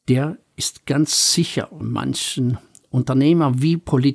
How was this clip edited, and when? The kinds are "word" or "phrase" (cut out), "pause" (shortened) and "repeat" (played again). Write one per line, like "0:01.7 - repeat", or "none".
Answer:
0:01.8 - word